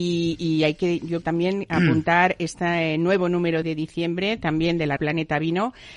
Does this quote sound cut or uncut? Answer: cut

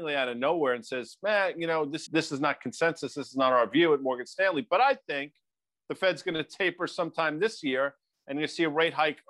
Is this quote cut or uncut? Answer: cut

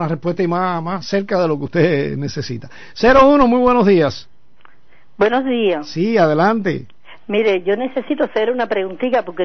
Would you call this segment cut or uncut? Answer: uncut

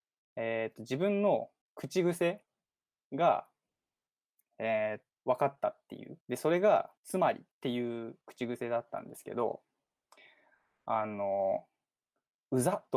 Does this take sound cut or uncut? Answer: cut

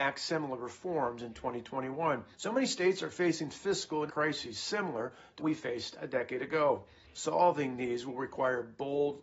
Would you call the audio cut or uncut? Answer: cut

